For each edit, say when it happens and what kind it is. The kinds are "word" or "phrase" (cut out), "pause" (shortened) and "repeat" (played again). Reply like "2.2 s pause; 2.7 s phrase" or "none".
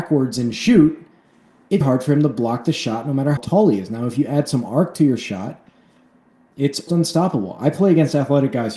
1.8 s word; 3.4 s word; 6.9 s word